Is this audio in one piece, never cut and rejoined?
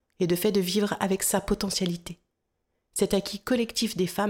yes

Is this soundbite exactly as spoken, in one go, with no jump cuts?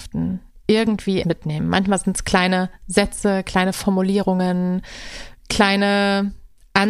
no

